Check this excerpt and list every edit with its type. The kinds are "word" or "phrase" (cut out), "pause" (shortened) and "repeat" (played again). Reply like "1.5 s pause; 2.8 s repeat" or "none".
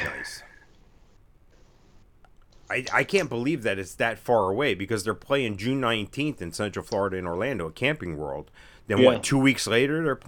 none